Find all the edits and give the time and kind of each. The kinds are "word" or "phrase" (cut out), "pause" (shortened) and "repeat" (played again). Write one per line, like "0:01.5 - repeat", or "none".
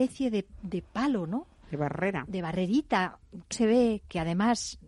0:03.5 - word